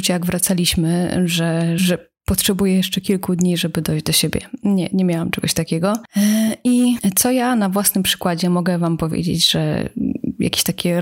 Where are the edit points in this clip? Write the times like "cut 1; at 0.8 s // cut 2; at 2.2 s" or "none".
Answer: cut 1; at 1.8 s